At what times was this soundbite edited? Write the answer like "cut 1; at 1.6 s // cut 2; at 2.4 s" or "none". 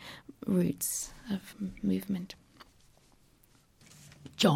cut 1; at 1.5 s